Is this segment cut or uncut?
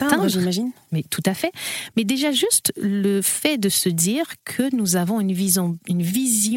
cut